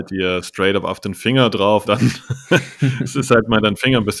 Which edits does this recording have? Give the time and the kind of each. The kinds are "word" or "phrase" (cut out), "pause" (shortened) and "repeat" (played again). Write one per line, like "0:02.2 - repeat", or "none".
0:01.8 - word